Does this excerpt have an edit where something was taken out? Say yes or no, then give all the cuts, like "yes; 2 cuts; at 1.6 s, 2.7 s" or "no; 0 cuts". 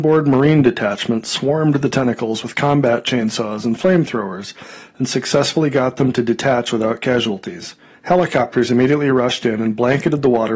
yes; 1 cut; at 7.9 s